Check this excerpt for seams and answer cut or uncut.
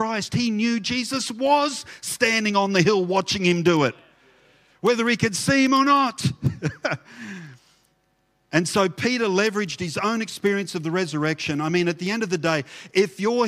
uncut